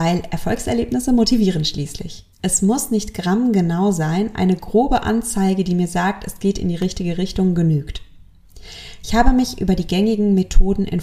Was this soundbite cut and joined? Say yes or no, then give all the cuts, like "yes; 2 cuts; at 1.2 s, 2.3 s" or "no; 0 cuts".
yes; 1 cut; at 2.3 s